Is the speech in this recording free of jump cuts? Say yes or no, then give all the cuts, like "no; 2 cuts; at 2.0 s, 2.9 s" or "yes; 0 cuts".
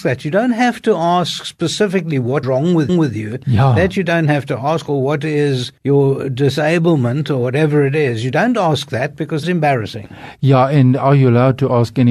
no; 4 cuts; at 2.4 s, 2.9 s, 5.8 s, 9.4 s